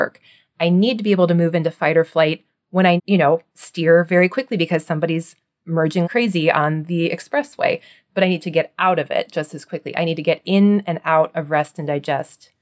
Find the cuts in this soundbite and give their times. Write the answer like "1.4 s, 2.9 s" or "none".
3.0 s, 6.0 s